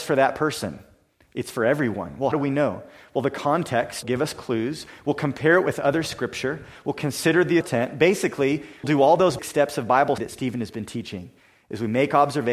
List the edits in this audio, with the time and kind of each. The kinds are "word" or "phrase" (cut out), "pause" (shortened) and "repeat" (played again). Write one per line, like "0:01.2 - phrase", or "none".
0:02.3 - word
0:04.0 - word
0:07.6 - word
0:08.8 - word
0:09.4 - word
0:10.2 - word

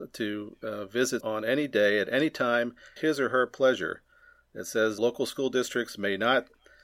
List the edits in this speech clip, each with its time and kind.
0:01.2 - word
0:03.0 - word
0:05.0 - word

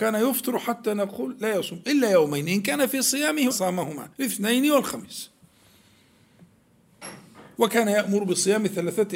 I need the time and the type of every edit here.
0:03.5 - word
0:04.1 - pause

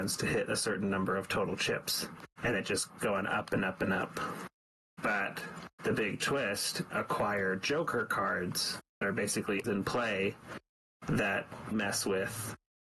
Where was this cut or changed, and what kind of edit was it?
0:02.3 - pause
0:03.0 - word
0:05.7 - pause
0:06.9 - phrase
0:09.0 - word
0:09.6 - word
0:11.7 - word

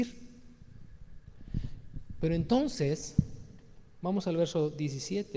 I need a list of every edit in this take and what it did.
none

